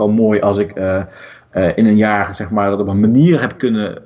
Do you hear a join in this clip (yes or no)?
no